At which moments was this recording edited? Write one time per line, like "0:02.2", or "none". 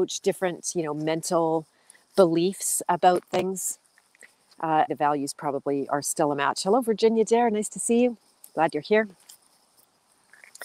0:04.9